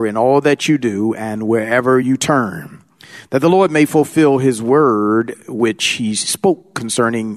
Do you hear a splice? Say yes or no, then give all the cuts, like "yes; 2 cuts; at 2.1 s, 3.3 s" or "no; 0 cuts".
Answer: no; 0 cuts